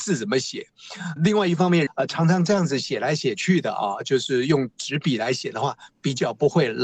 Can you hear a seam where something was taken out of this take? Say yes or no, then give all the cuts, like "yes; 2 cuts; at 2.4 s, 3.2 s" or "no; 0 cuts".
yes; 2 cuts; at 1.2 s, 1.9 s